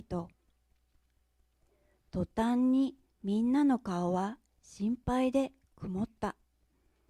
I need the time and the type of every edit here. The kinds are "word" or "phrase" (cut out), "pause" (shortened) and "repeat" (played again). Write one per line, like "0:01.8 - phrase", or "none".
none